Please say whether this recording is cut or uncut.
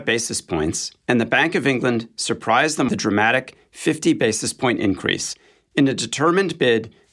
cut